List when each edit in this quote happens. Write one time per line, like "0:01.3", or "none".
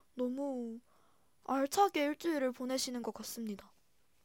none